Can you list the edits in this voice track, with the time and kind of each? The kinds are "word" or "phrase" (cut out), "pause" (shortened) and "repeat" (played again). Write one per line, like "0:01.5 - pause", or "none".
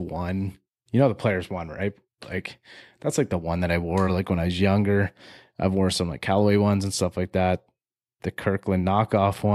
none